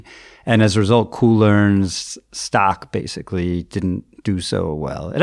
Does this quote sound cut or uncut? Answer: uncut